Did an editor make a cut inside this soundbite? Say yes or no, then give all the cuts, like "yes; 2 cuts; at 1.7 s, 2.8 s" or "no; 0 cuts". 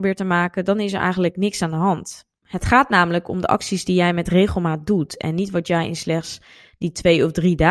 no; 0 cuts